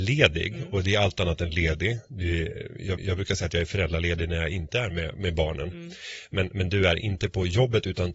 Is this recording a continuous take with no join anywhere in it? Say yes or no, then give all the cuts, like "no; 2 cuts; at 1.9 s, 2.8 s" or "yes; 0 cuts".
no; 1 cut; at 3.0 s